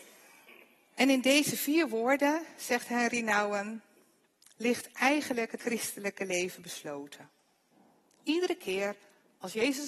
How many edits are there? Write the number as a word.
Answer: one